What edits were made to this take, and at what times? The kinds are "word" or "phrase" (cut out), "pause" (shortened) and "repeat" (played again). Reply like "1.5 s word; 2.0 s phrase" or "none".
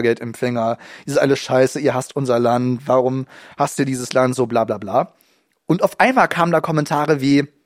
none